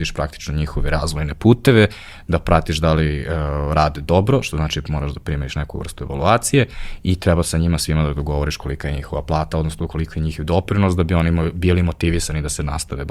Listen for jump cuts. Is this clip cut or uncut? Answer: uncut